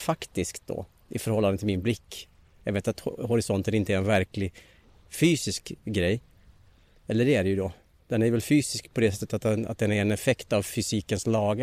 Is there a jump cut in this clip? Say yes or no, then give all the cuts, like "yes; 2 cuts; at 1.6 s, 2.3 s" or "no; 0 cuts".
no; 0 cuts